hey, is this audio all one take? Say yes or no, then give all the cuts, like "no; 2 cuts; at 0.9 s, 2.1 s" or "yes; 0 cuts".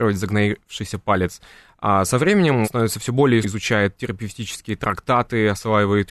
no; 2 cuts; at 2.6 s, 3.4 s